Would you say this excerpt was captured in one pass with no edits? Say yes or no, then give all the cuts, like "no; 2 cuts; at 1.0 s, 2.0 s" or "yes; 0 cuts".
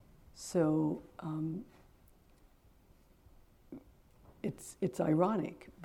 yes; 0 cuts